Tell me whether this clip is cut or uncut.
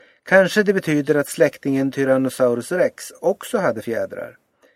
uncut